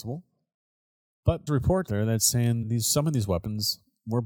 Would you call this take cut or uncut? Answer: cut